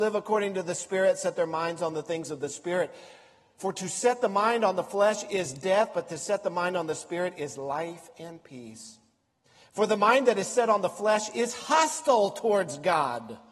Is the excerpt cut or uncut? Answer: uncut